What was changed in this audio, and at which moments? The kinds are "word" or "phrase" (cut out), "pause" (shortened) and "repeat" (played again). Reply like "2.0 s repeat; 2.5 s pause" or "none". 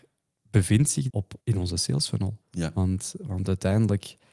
1.1 s word; 1.4 s pause; 2.4 s pause